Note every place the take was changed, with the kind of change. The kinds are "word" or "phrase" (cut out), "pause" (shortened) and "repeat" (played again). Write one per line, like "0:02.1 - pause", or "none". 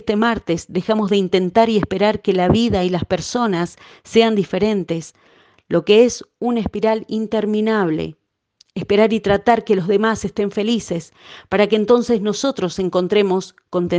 none